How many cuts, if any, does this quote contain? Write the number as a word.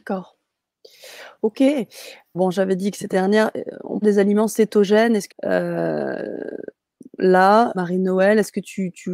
five